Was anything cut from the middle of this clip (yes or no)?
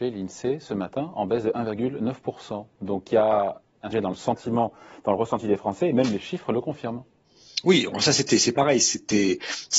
yes